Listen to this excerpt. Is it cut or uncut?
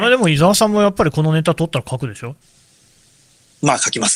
uncut